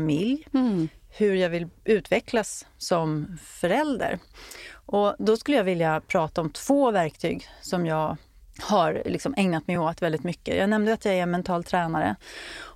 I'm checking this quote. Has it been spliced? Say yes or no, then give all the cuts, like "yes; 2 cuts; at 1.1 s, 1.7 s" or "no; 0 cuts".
no; 0 cuts